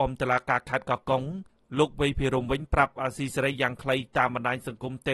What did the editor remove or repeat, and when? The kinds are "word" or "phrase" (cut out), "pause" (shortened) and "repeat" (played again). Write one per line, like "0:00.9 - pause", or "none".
none